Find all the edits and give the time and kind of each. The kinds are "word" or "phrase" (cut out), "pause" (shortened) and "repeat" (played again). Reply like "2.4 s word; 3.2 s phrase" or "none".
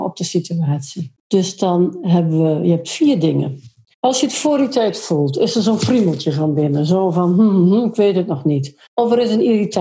1.2 s pause; 3.9 s pause; 8.9 s pause